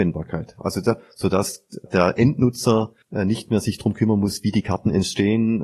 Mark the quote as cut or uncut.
cut